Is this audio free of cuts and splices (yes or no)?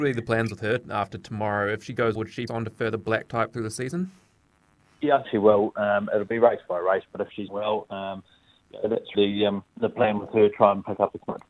no